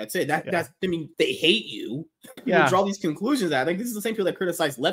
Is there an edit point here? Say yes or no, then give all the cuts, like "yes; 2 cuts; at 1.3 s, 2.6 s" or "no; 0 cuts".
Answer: yes; 2 cuts; at 1.1 s, 2.4 s